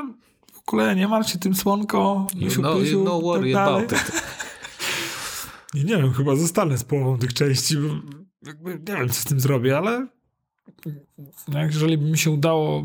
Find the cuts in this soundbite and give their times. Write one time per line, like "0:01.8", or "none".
none